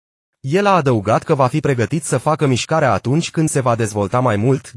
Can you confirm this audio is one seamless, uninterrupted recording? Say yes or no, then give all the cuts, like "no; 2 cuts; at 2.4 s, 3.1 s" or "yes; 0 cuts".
no; 1 cut; at 3.5 s